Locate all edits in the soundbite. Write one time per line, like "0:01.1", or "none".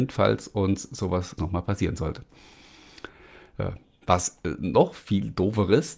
0:01.4